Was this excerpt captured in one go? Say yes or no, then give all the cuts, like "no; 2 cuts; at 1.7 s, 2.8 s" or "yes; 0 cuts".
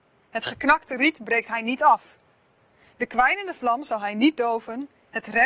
yes; 0 cuts